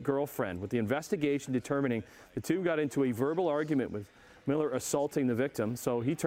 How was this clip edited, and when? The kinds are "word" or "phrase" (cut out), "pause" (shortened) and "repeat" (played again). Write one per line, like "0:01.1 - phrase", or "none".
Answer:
none